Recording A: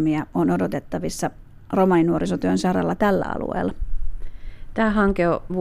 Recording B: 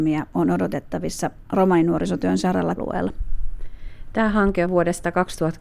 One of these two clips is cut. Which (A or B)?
B